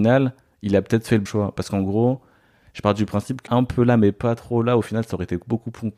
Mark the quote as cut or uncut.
cut